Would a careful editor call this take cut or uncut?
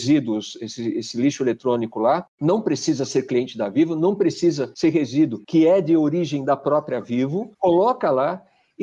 uncut